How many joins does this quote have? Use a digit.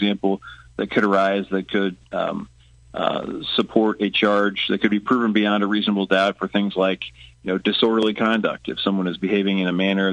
0